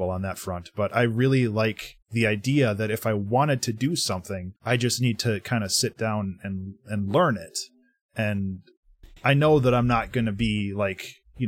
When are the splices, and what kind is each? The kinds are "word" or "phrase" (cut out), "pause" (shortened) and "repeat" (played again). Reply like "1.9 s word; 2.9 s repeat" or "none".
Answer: 4.6 s pause